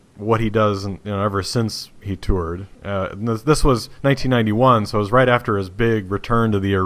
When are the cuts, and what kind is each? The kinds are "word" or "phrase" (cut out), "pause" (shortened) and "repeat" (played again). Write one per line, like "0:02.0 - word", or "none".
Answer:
0:02.8 - pause